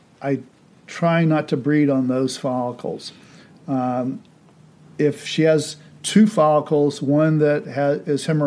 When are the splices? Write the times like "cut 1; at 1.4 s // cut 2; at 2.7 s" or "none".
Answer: none